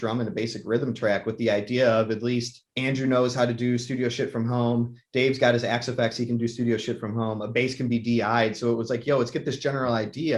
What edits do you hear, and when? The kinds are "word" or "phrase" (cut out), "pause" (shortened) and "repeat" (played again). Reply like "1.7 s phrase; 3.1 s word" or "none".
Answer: 2.7 s pause